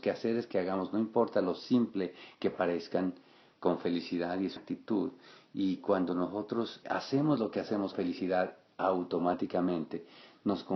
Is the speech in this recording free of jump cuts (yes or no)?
no